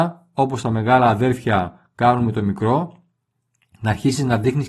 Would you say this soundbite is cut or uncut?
uncut